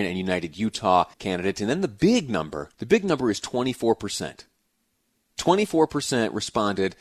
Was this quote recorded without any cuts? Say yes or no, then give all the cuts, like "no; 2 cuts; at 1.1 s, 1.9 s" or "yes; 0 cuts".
no; 2 cuts; at 1.1 s, 2.7 s